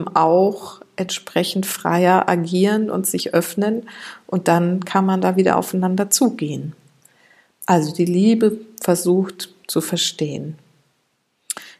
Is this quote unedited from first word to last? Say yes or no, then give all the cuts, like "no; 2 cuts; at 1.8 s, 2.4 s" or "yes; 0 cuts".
yes; 0 cuts